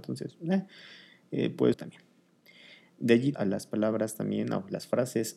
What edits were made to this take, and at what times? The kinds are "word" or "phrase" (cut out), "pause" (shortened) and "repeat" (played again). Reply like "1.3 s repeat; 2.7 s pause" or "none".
1.7 s word; 3.3 s word